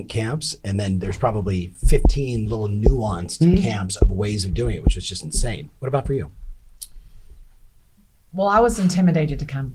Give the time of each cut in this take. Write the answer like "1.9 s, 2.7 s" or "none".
none